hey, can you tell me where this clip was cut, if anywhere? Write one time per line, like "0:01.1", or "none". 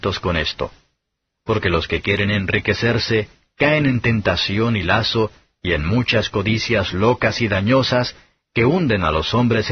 none